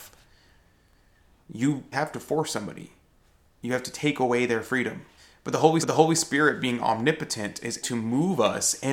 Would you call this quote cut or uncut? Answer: cut